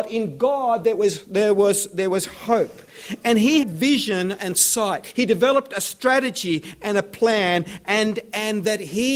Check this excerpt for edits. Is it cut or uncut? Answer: cut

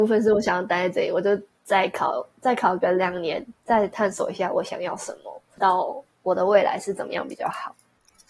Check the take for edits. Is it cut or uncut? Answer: cut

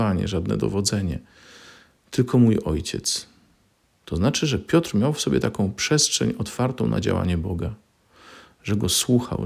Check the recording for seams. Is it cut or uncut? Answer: uncut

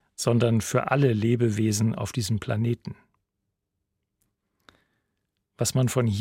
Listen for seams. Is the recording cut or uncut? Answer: uncut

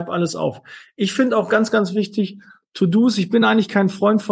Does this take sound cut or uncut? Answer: uncut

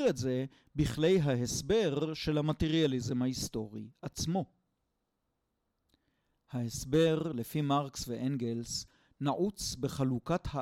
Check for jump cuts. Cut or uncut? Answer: uncut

